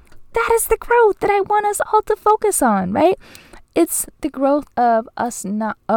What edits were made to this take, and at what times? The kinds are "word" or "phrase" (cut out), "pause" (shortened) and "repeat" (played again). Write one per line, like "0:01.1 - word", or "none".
none